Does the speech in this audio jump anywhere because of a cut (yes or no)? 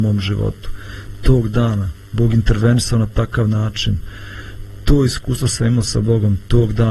no